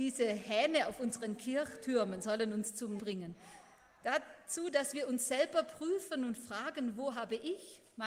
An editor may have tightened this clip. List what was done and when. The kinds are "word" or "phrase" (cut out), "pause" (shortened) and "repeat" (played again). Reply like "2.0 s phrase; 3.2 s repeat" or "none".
3.0 s word